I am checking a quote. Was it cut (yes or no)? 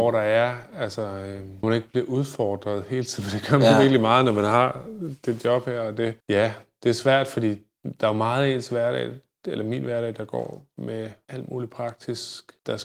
no